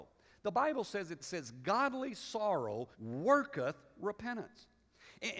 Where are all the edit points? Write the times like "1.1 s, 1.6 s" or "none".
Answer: 1.2 s, 2.9 s